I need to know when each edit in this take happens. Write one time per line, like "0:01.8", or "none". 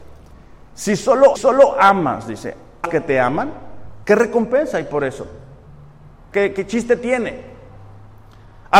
0:01.3
0:02.8
0:04.0
0:06.3